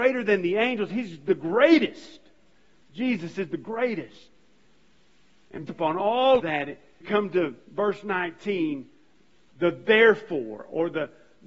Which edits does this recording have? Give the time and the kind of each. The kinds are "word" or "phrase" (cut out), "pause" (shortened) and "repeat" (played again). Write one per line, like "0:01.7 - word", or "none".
0:05.7 - word
0:06.4 - word
0:07.0 - word

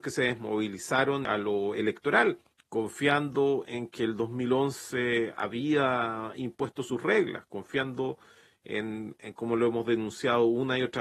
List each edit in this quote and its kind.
0:01.2 - word
0:02.5 - pause

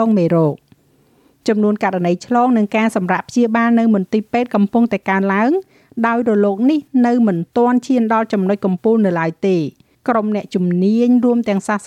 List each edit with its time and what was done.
0:09.9 - pause

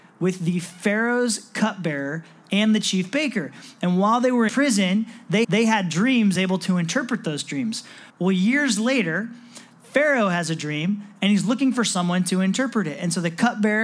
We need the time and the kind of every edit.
0:04.5 - word
0:05.4 - repeat
0:06.4 - phrase
0:08.1 - pause

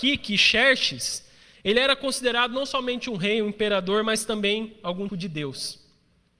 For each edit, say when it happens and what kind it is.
0:05.1 - word

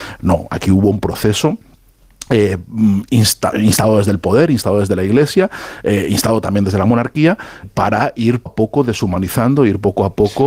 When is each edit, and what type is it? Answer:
0:03.5 - word
0:07.6 - word
0:08.5 - word

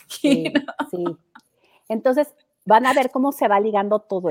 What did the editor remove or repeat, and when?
none

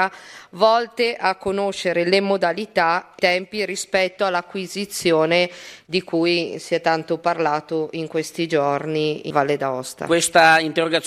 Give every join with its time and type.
0:03.2 - word
0:09.3 - word

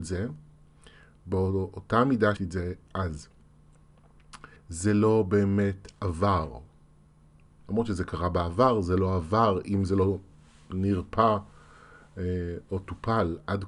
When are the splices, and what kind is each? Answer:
0:02.4 - word
0:04.6 - pause

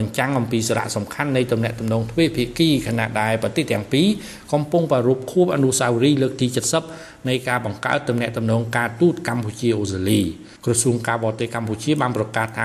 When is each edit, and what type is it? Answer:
0:10.6 - pause

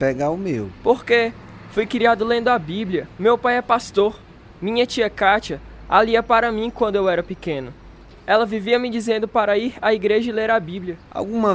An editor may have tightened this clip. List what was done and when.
none

